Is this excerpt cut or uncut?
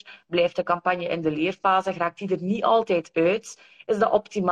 uncut